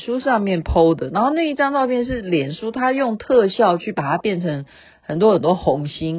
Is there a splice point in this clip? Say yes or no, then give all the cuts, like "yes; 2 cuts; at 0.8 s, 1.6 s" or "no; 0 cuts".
no; 0 cuts